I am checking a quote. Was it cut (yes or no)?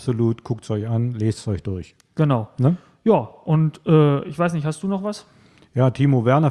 no